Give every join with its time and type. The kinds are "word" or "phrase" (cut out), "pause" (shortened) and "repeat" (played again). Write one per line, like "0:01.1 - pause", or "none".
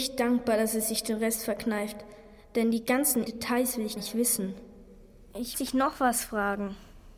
0:03.3 - word
0:04.0 - word
0:05.5 - word